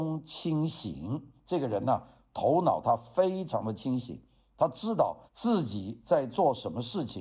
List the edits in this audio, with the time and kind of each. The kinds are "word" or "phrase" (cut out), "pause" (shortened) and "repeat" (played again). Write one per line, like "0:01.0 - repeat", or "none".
0:05.3 - pause